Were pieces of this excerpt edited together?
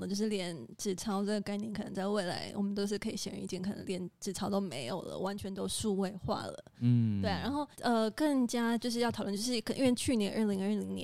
yes; 1 cut; at 7.7 s

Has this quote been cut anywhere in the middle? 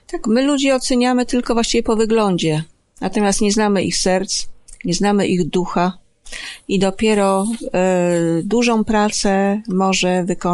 no; 0 cuts

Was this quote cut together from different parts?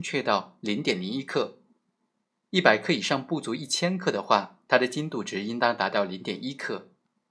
no; 0 cuts

